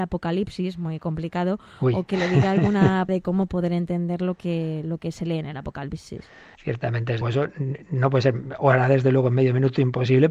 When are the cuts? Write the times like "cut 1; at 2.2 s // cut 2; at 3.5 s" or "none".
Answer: cut 1; at 3.1 s // cut 2; at 6.6 s // cut 3; at 7.2 s